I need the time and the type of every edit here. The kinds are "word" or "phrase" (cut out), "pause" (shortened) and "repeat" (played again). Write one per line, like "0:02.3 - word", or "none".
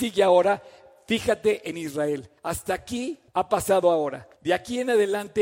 0:02.4 - pause
0:03.3 - pause
0:04.4 - pause